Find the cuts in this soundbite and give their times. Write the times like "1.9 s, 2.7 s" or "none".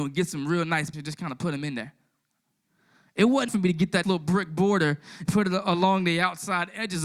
0.9 s, 3.5 s, 4.0 s, 5.3 s

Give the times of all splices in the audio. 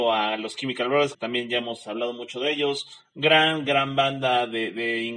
1.1 s

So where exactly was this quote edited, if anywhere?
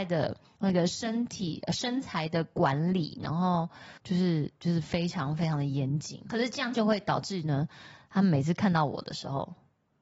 4.0 s

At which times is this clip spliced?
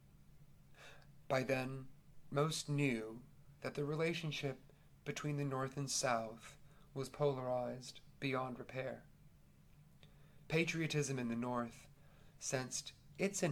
none

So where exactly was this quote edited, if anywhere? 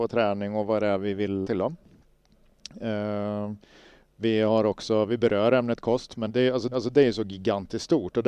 1.4 s, 6.3 s, 6.7 s

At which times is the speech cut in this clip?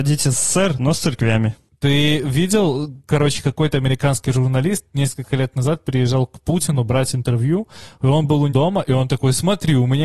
8.5 s

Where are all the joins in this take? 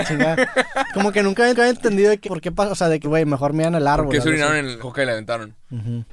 1.5 s, 2.2 s, 3.0 s, 4.8 s

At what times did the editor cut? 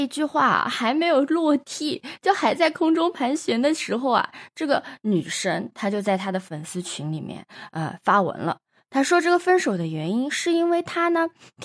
none

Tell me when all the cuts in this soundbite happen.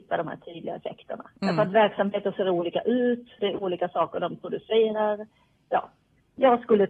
none

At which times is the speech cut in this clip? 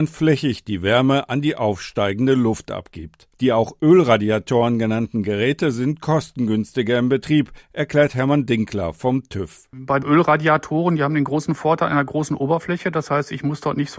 3.3 s

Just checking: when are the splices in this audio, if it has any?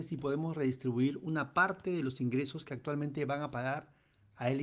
none

